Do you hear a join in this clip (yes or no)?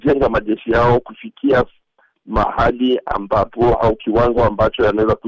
no